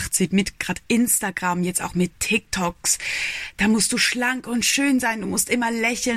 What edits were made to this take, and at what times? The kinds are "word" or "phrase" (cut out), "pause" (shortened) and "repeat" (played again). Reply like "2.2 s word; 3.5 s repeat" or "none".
none